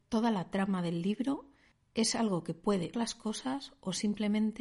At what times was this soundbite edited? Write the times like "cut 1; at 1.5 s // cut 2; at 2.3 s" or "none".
cut 1; at 1.7 s // cut 2; at 2.9 s